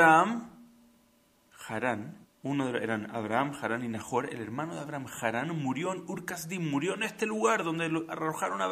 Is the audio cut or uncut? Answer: cut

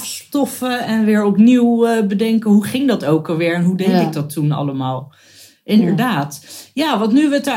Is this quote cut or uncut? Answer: uncut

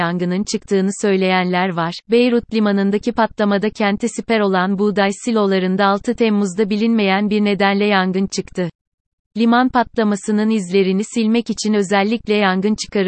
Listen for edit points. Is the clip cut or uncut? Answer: uncut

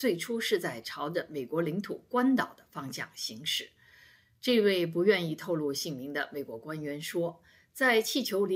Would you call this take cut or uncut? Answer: uncut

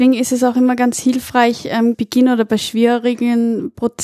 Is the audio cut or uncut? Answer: cut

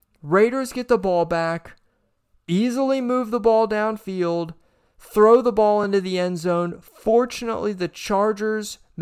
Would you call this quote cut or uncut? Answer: uncut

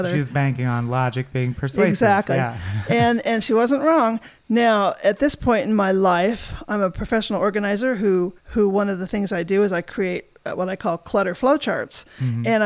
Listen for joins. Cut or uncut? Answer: cut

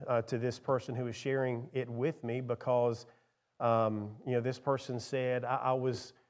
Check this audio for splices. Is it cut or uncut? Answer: uncut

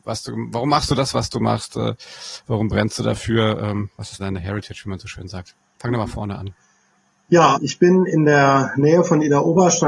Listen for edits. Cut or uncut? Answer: cut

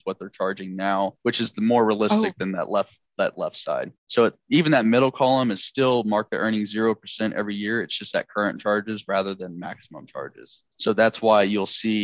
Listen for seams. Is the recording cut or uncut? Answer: cut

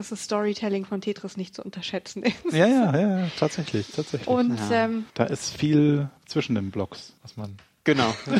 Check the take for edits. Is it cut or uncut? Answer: cut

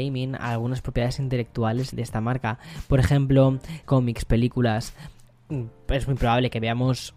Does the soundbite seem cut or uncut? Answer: cut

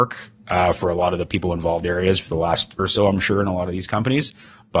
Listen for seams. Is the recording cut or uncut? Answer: cut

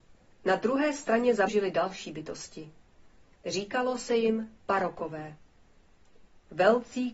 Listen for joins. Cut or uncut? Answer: cut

